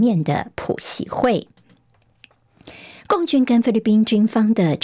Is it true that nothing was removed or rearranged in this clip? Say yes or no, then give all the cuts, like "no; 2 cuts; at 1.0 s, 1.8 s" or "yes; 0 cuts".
yes; 0 cuts